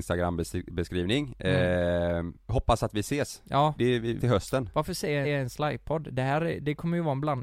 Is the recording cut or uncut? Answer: cut